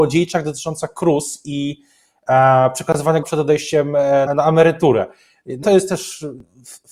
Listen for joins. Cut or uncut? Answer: cut